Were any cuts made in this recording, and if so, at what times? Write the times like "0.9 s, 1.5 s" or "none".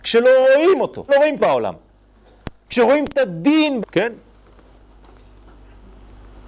1.1 s, 1.4 s, 3.8 s